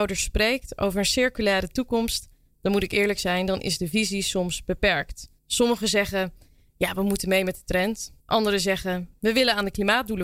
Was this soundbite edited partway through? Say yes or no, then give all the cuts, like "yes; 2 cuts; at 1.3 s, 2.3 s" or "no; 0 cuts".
yes; 2 cuts; at 5.4 s, 8.2 s